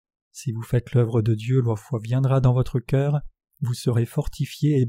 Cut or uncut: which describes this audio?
uncut